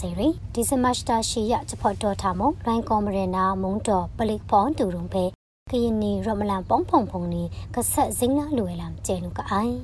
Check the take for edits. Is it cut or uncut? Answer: uncut